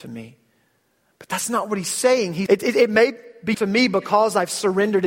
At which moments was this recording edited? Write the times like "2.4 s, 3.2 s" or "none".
2.5 s, 3.5 s